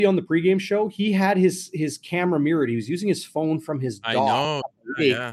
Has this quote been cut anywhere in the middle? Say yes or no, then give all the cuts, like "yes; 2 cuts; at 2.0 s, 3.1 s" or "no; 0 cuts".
no; 0 cuts